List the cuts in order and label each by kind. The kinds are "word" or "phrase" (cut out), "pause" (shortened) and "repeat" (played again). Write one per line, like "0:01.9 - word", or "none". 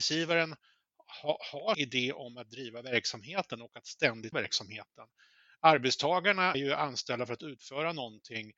0:01.7 - word
0:04.3 - word
0:06.5 - word